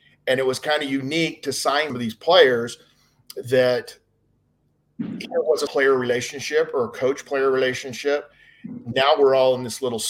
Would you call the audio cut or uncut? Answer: cut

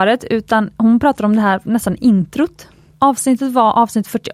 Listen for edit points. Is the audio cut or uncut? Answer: uncut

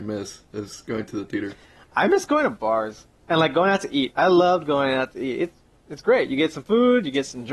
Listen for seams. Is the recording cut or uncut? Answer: uncut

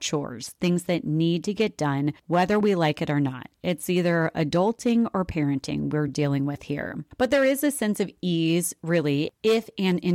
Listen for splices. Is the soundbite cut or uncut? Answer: uncut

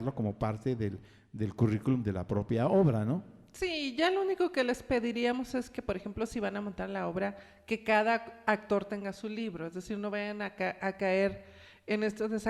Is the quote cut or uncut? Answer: uncut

